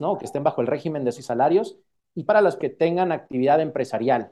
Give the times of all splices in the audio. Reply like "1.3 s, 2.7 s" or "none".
1.2 s, 2.3 s, 2.6 s